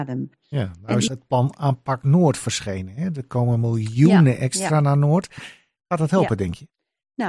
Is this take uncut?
yes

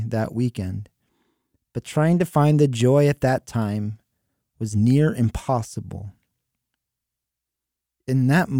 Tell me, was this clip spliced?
no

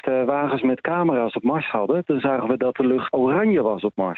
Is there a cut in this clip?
yes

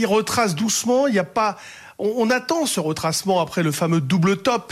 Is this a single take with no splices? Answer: yes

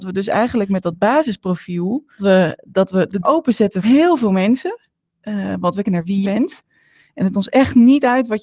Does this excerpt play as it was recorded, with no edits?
no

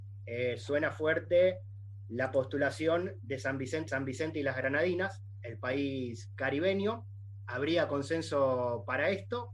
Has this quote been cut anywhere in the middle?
yes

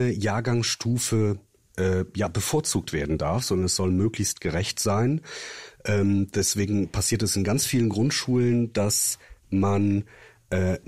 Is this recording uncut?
yes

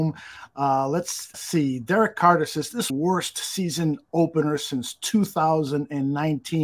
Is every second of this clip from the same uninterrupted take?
no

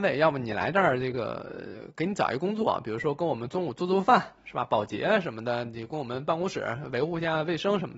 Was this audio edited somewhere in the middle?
no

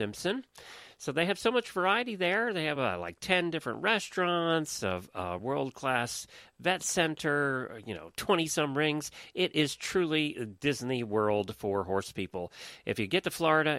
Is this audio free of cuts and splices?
yes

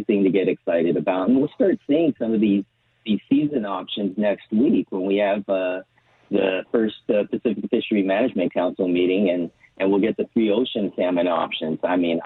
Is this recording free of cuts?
yes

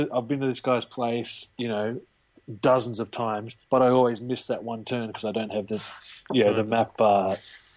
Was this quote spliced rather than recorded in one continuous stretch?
yes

